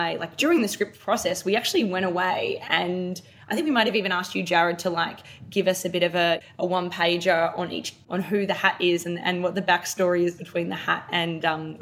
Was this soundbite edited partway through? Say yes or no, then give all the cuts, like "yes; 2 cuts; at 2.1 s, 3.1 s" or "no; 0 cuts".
no; 0 cuts